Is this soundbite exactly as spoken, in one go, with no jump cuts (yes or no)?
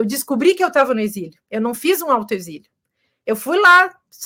yes